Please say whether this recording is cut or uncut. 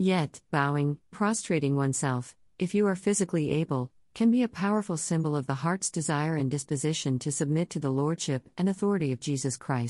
cut